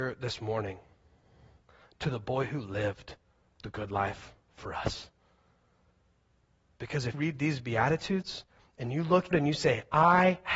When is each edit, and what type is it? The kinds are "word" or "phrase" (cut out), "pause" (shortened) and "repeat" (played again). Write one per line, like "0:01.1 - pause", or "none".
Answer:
0:07.1 - word
0:09.3 - word